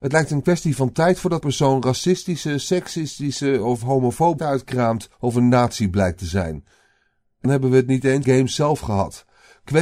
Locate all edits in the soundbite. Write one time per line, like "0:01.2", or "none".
0:01.4
0:04.4
0:05.1
0:07.4
0:08.2